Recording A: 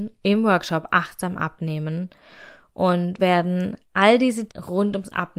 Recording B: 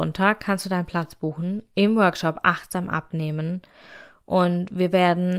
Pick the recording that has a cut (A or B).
A